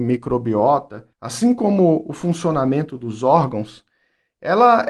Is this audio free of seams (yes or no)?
no